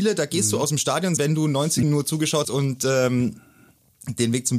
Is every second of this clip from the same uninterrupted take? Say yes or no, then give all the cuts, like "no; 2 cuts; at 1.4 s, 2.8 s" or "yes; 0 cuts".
no; 3 cuts; at 1.2 s, 1.8 s, 2.4 s